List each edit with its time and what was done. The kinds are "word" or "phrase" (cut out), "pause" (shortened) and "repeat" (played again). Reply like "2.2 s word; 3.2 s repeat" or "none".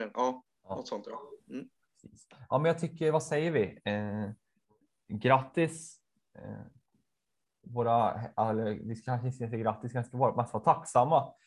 none

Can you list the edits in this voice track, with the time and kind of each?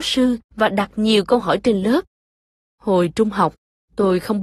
none

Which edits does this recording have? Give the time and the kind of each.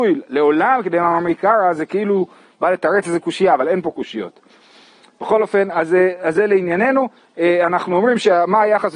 none

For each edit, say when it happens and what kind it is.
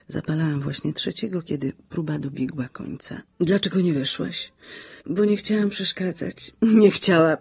3.3 s pause; 5.0 s pause

